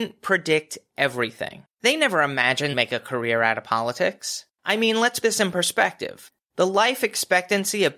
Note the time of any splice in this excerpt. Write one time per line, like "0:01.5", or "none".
0:01.7
0:02.7
0:05.2